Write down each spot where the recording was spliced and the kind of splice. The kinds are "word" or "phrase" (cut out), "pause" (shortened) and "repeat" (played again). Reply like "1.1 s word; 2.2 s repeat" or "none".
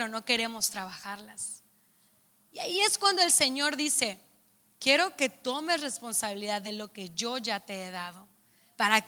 none